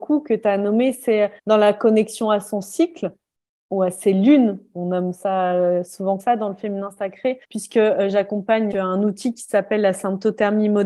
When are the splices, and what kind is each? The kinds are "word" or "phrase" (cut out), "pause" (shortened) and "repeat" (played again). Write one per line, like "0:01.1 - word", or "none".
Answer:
0:01.4 - pause
0:06.2 - word
0:07.4 - pause
0:08.7 - word